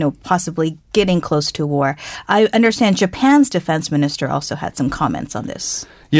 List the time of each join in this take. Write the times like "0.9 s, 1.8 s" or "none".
none